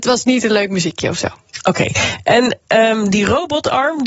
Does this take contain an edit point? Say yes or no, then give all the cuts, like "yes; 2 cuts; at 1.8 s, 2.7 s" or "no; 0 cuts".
no; 0 cuts